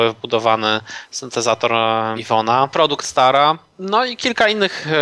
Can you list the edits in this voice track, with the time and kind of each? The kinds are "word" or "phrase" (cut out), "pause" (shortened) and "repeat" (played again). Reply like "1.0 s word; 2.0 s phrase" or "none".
2.2 s word; 3.0 s word